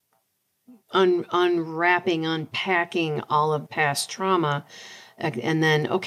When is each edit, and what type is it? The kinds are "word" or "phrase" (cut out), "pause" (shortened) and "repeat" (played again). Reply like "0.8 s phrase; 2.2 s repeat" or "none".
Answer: 3.7 s word